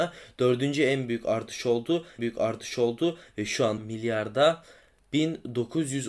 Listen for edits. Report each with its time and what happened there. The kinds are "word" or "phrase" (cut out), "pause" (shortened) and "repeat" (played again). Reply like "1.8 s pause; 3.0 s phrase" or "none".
2.2 s repeat; 3.8 s word